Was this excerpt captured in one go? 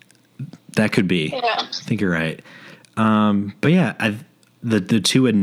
yes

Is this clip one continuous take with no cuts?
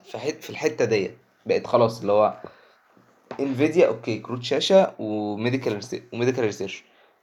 yes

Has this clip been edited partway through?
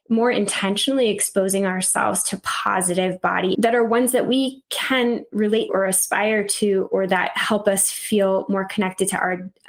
yes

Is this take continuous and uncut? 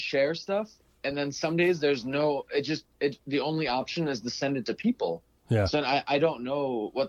yes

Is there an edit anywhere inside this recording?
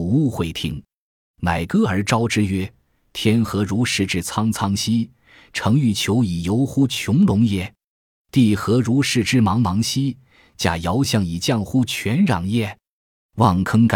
no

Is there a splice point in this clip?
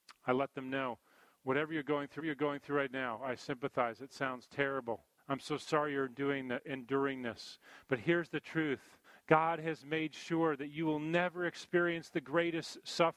yes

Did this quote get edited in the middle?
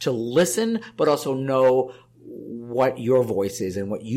no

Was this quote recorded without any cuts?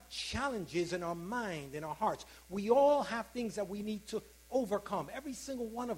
yes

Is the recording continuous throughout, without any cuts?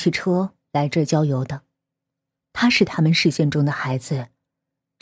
yes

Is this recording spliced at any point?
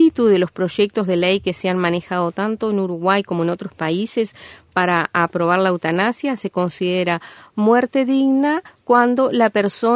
no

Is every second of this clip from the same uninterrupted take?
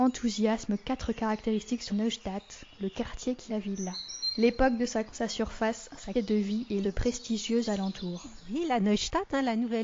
no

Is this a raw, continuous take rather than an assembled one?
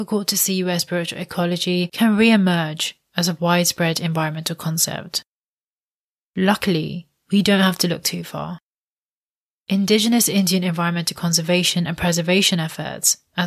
yes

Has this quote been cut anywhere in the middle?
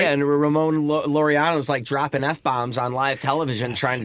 no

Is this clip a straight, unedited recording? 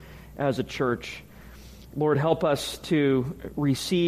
yes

